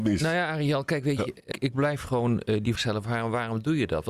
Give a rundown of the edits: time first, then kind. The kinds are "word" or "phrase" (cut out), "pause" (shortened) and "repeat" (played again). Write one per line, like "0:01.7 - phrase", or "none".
0:01.5 - word
0:02.8 - word